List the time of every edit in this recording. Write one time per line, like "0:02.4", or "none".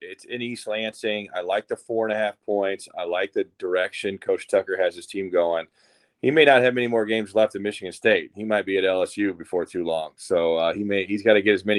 none